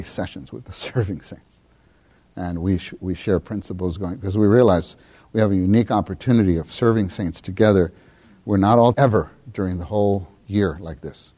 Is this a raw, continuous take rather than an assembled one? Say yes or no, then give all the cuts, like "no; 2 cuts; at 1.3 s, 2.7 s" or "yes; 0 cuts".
no; 1 cut; at 8.9 s